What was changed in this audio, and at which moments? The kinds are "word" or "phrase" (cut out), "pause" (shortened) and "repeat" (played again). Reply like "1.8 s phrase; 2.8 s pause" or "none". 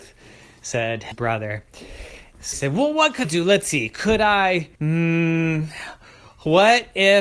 1.1 s word; 2.5 s word; 3.2 s word; 4.7 s pause